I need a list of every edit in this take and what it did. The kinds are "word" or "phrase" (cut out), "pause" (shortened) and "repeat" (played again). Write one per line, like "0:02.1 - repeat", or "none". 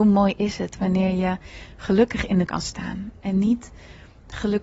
0:02.5 - word